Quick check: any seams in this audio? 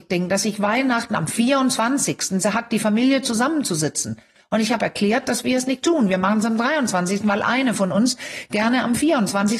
no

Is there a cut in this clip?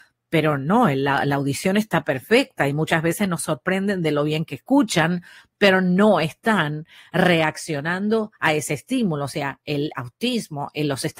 no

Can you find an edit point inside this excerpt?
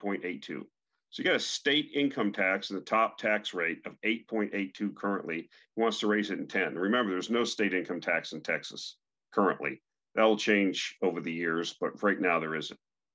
no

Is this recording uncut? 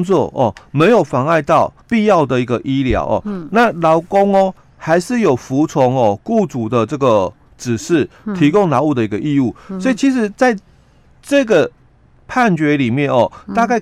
no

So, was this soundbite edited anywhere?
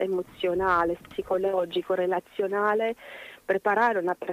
yes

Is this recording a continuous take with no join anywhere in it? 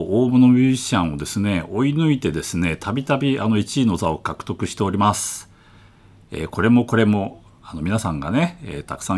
yes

